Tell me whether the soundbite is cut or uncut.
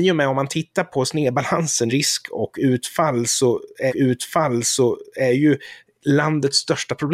cut